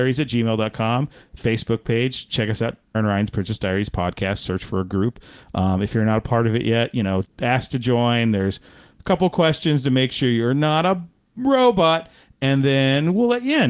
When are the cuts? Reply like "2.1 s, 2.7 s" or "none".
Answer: 2.9 s, 7.2 s

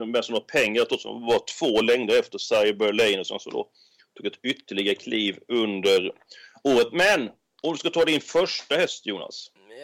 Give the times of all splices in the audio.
none

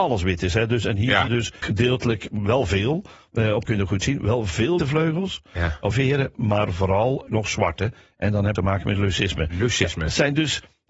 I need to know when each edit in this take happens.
1.3 s, 1.6 s, 3.7 s, 4.8 s, 5.9 s, 7.3 s, 8.6 s

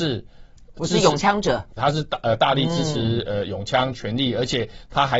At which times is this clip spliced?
1.8 s

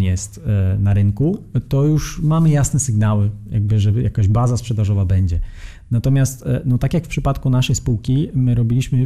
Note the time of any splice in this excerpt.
none

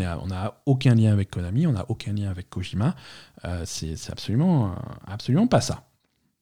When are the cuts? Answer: none

